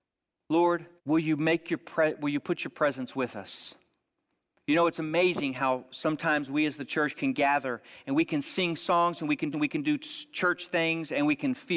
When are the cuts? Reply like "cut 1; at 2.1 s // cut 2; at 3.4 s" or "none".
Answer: cut 1; at 1.0 s // cut 2; at 9.5 s